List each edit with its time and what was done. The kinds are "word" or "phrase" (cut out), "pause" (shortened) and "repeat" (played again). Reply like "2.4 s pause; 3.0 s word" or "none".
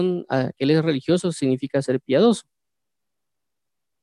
none